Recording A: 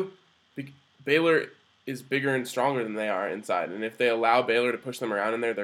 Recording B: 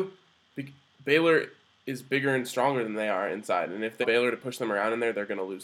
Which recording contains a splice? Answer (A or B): B